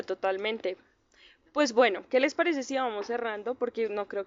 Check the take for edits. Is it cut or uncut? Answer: uncut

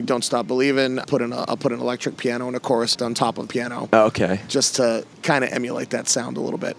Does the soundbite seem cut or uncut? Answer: cut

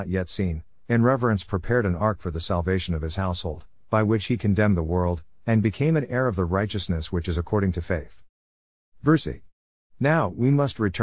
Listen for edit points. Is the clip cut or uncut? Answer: uncut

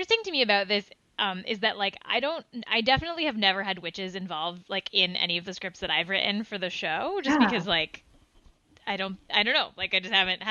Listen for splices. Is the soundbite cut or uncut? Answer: uncut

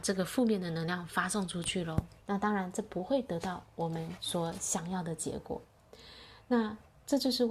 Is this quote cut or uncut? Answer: cut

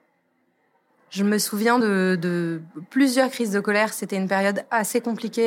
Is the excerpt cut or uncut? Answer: uncut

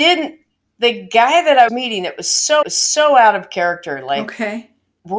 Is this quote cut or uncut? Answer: cut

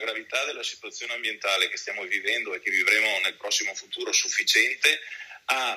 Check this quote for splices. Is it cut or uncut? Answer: uncut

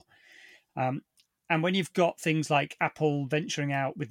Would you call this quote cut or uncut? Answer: uncut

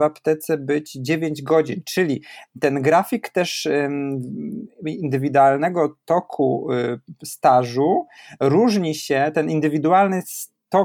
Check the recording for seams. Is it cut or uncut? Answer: uncut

